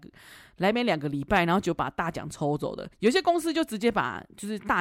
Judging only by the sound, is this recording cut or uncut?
cut